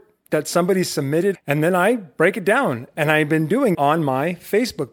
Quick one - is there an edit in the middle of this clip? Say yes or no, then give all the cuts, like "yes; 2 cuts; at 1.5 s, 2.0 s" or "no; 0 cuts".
yes; 2 cuts; at 1.3 s, 3.7 s